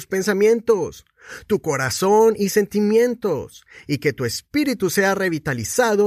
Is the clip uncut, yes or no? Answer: yes